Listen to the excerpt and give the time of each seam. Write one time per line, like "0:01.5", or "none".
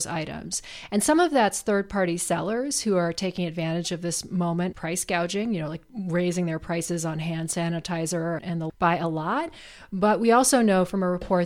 0:04.7
0:08.4
0:08.7